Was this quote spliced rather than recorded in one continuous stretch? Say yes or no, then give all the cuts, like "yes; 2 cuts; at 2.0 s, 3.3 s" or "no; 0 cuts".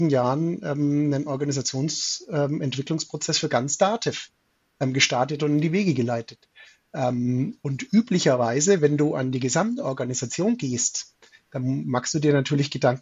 no; 0 cuts